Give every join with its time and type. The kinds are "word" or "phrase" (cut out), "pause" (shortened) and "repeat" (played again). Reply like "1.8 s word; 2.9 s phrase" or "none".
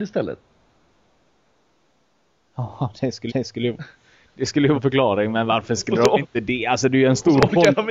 3.3 s repeat; 4.7 s word